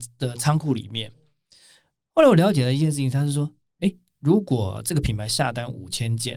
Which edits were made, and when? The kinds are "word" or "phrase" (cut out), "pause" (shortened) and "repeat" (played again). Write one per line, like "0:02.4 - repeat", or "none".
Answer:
none